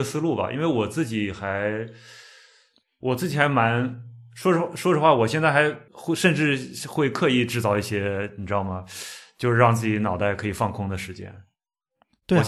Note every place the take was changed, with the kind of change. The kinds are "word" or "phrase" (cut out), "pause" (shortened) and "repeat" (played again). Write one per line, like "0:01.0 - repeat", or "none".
0:05.9 - pause